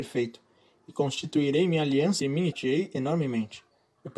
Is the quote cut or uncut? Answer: cut